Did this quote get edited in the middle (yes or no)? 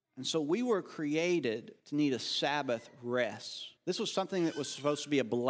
yes